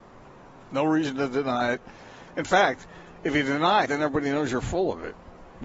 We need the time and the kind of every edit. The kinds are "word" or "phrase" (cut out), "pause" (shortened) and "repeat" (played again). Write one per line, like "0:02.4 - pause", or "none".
0:03.9 - word